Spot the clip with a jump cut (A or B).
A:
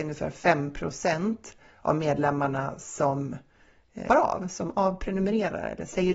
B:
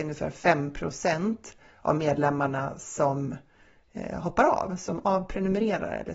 A